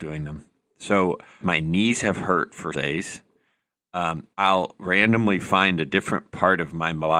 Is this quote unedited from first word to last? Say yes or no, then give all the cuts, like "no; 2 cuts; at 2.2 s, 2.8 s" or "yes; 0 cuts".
no; 3 cuts; at 1.4 s, 2.7 s, 4.3 s